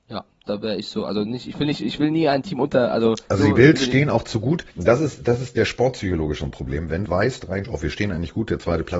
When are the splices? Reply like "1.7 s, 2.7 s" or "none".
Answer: 3.2 s, 4.7 s, 5.6 s, 7.1 s, 7.6 s